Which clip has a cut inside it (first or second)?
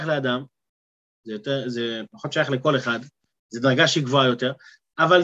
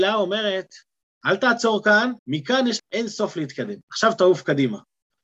second